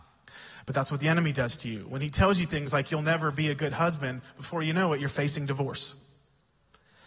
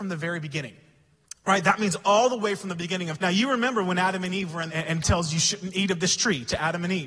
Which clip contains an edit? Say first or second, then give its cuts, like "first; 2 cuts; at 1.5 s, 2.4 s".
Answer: second; 3 cuts; at 3.2 s, 4.7 s, 5.0 s